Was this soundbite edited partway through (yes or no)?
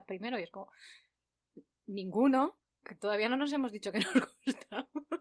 no